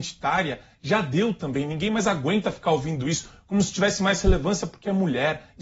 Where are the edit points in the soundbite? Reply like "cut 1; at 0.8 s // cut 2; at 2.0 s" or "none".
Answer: none